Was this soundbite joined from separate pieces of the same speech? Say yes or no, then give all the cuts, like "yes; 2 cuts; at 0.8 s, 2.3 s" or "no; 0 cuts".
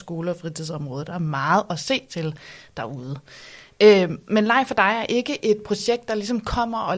no; 0 cuts